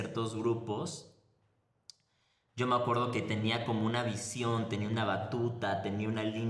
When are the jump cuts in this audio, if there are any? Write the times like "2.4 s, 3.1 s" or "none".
none